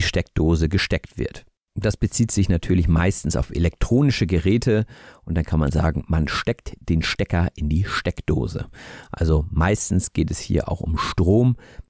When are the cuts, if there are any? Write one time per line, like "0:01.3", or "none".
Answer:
none